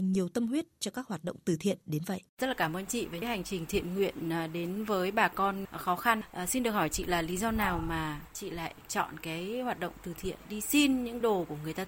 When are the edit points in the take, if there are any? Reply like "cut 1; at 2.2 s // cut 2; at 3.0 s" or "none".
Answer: cut 1; at 2.3 s